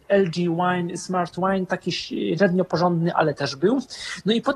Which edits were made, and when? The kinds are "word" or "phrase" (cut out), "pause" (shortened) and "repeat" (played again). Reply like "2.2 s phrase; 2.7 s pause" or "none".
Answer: none